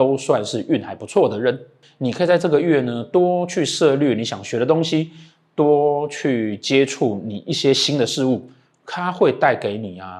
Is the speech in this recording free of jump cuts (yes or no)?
yes